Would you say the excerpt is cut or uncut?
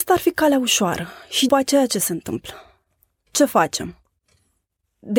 cut